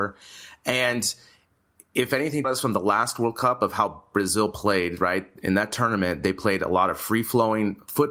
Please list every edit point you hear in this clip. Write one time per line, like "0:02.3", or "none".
0:02.4

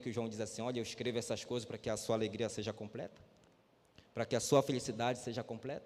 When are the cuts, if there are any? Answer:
none

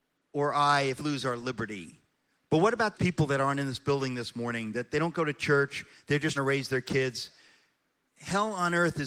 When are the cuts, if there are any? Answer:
0:01.0
0:02.9
0:06.4

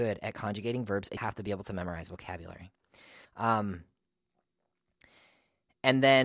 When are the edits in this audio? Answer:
0:01.2
0:03.2

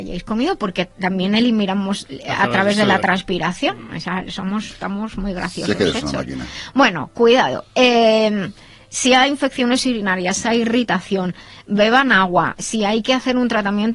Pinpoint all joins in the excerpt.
none

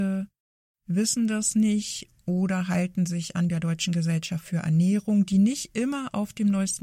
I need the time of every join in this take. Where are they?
0:03.5

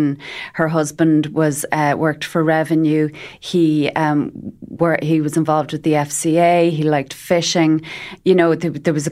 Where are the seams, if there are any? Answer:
none

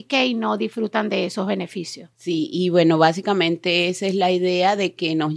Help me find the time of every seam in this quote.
0:02.1

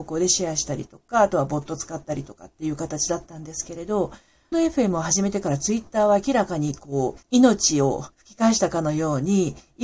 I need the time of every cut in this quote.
0:04.5
0:07.2
0:08.1

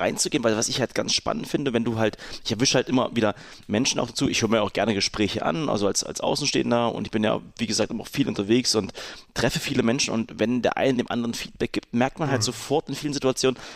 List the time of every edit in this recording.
none

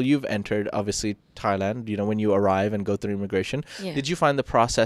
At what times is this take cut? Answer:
none

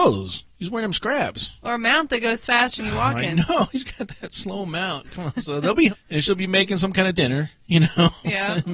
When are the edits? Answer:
0:02.8
0:05.9
0:07.2

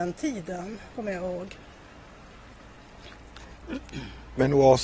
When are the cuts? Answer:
0:00.9

